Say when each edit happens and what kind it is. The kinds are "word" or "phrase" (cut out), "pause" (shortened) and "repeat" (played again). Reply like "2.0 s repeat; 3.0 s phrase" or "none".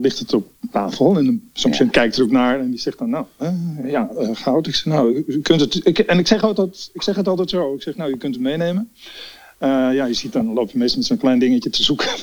none